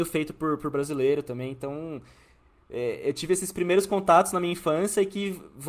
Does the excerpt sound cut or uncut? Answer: uncut